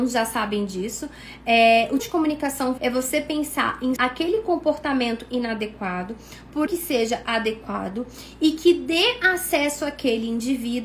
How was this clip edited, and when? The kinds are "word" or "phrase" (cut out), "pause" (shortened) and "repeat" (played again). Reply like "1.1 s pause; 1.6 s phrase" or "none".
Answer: 2.0 s word; 2.8 s word; 4.0 s word; 6.7 s word